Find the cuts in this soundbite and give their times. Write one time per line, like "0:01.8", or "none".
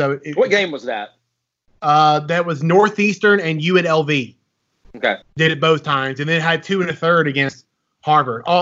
0:05.2